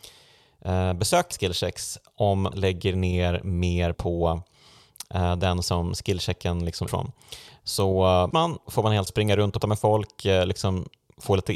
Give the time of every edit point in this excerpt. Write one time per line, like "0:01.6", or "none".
0:01.3
0:02.5
0:03.9
0:05.6
0:06.9
0:08.3
0:08.7
0:09.1
0:09.6